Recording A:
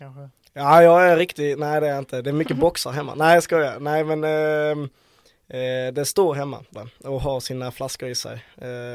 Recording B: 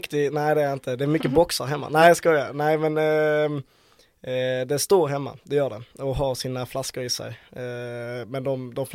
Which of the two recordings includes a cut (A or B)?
A